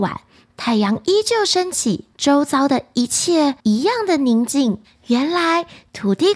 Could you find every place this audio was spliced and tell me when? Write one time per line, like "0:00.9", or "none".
0:02.1
0:03.6